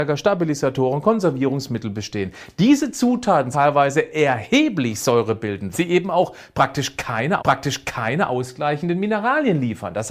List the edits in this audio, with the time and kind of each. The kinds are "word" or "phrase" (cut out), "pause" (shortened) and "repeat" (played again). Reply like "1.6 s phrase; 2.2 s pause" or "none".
3.5 s word; 5.7 s word; 7.4 s repeat